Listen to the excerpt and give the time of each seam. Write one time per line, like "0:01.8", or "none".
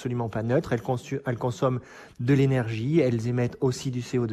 none